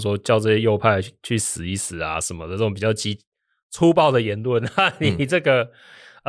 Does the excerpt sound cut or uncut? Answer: uncut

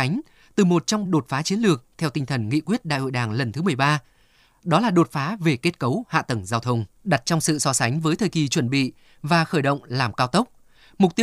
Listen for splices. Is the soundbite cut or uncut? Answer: cut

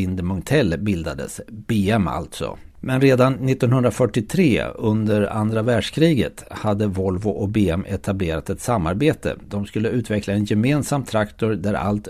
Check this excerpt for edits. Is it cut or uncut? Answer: cut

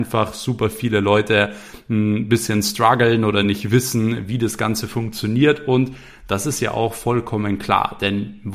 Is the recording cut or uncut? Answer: uncut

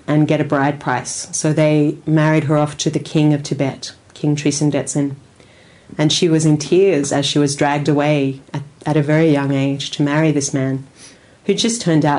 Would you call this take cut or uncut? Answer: uncut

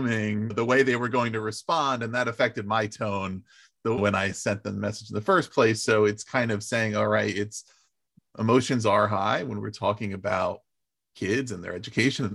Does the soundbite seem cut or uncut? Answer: uncut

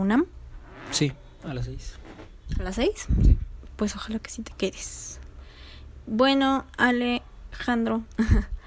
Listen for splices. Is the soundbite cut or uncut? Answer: uncut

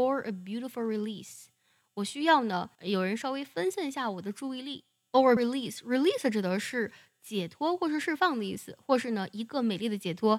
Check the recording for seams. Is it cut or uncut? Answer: cut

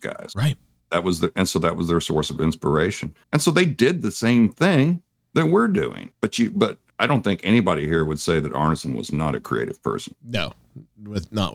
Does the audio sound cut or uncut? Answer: cut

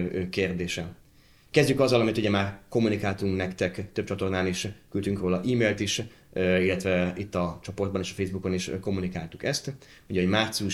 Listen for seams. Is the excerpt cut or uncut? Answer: uncut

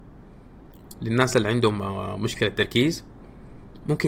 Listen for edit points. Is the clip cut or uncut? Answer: uncut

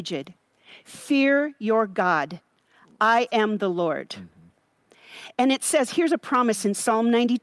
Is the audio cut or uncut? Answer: uncut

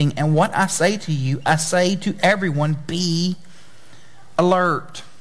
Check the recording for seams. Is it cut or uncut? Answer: uncut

